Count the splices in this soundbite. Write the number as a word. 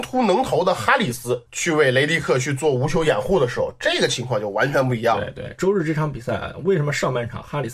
one